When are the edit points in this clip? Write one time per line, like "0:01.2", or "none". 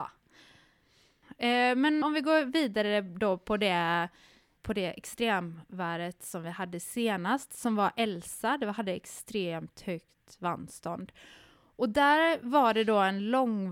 0:02.0
0:04.6